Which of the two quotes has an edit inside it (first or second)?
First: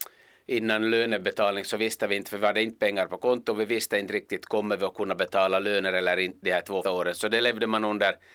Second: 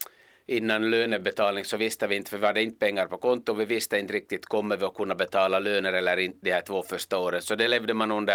first